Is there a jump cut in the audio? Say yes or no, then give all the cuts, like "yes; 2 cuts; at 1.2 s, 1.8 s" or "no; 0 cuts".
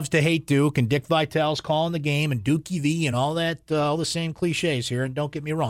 no; 0 cuts